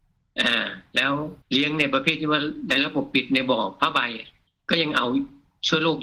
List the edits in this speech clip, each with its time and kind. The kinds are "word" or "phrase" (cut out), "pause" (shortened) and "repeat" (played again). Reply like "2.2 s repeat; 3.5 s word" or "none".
1.4 s pause